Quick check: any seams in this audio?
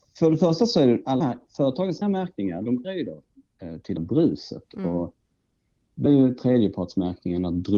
yes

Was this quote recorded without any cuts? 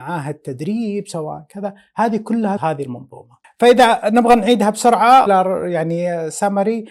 no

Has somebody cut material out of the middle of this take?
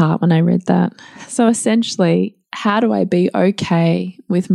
no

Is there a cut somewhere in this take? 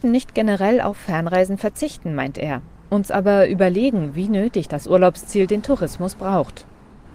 no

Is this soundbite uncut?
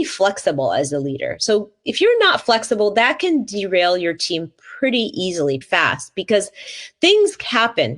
no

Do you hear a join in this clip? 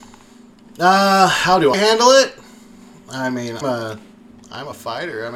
yes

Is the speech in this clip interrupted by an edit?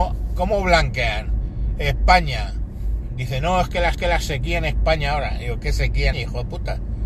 yes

